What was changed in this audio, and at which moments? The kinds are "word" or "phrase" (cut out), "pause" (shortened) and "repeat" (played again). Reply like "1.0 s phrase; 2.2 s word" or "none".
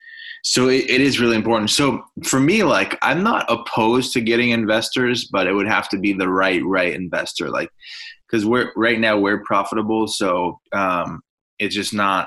10.6 s pause